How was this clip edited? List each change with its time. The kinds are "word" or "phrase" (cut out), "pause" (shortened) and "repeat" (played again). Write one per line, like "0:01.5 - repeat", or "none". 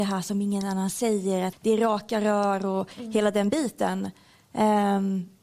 0:01.5 - word